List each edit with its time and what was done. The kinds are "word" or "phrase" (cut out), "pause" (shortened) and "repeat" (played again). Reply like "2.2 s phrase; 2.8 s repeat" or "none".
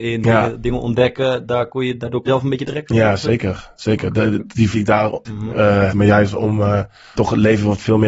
2.3 s word; 2.6 s word; 4.4 s word; 4.7 s word; 5.2 s word; 5.9 s word; 7.1 s word

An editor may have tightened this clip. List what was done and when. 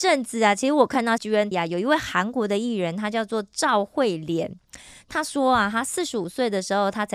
1.2 s word; 1.5 s word

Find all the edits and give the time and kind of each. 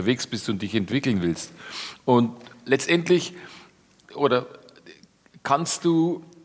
4.0 s word

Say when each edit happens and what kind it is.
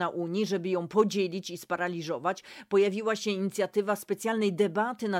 none

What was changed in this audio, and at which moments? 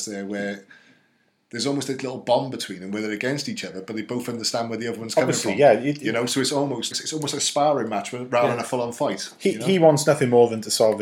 6.9 s word

